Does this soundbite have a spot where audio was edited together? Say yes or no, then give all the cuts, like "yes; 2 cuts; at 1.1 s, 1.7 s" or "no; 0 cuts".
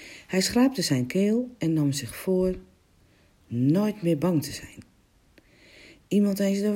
no; 0 cuts